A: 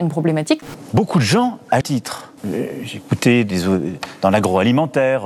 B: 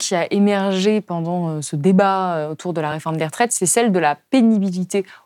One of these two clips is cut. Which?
A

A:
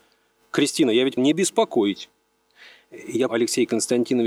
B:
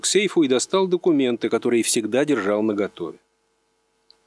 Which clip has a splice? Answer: A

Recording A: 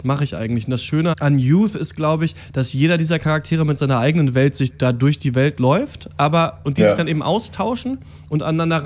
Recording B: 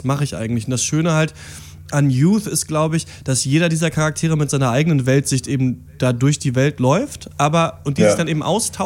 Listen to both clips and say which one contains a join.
A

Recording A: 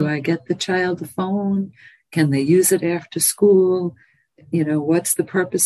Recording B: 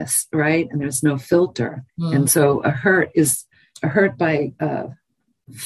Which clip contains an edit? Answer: B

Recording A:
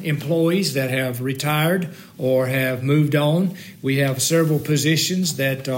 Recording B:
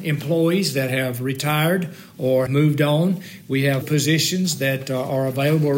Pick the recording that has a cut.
B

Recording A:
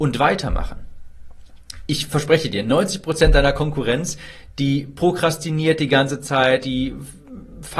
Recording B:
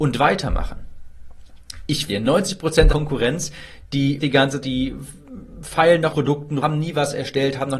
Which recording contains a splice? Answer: B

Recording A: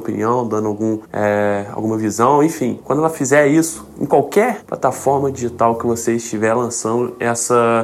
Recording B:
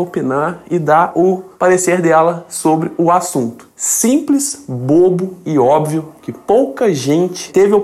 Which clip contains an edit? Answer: A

